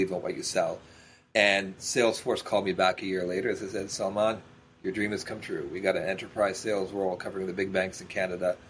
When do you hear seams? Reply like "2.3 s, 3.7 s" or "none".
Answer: none